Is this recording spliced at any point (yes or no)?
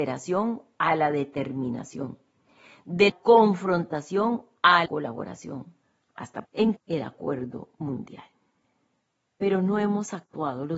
yes